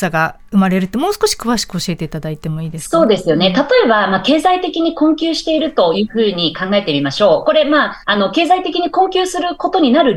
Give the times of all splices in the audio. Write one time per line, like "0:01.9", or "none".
0:08.0